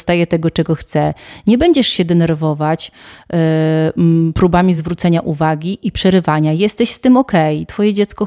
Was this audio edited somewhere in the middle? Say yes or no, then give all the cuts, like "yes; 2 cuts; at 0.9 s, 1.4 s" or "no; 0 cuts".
no; 0 cuts